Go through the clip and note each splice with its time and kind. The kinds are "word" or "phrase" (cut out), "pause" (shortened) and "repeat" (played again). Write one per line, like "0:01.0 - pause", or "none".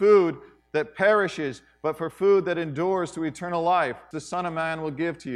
0:04.1 - word